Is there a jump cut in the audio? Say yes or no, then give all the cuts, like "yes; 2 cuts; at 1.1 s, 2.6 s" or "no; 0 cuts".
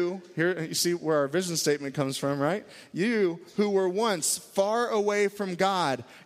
no; 0 cuts